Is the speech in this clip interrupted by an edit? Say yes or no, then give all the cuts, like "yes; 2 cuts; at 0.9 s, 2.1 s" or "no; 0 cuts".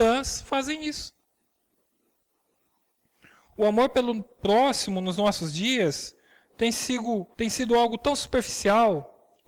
yes; 1 cut; at 7.3 s